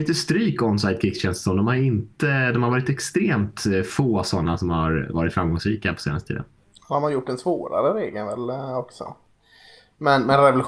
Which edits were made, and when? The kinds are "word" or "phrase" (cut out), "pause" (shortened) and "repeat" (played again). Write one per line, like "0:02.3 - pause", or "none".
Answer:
none